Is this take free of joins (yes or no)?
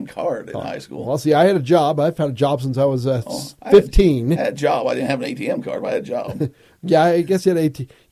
no